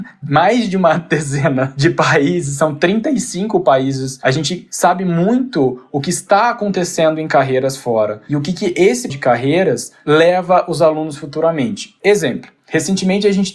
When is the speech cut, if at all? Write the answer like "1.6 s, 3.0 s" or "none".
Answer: 9.1 s